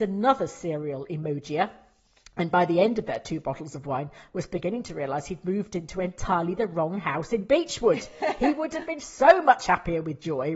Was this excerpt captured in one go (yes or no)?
yes